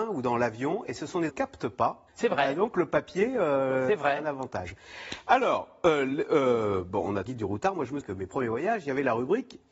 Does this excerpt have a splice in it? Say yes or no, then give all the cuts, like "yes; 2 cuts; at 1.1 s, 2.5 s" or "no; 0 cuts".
yes; 4 cuts; at 1.3 s, 2.1 s, 7.3 s, 8.0 s